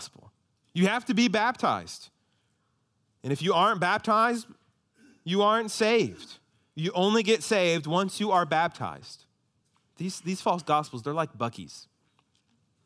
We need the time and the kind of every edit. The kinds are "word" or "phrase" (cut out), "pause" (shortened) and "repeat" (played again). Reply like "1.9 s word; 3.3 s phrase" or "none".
9.6 s pause